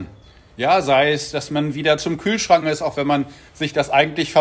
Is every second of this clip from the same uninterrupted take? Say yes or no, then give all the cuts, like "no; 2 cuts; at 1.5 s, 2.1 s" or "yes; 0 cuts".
no; 1 cut; at 2.6 s